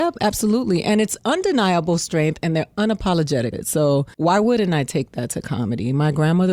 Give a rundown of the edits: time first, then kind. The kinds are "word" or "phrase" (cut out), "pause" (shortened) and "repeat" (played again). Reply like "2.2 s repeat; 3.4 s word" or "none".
3.5 s word; 4.1 s pause